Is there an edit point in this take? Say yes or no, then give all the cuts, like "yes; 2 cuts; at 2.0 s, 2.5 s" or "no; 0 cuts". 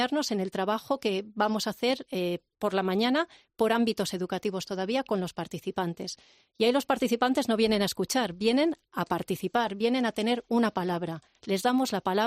no; 0 cuts